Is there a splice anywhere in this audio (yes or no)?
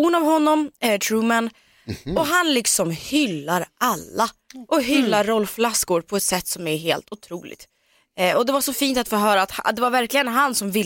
no